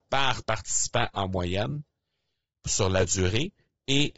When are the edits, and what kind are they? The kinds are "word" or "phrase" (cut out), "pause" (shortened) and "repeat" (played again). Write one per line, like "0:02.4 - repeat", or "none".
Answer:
none